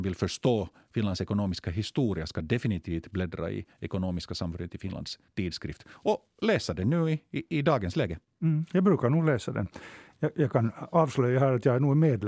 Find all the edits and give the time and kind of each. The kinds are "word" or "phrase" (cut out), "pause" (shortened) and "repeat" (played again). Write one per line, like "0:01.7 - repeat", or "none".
0:03.7 - pause
0:05.3 - pause
0:08.3 - pause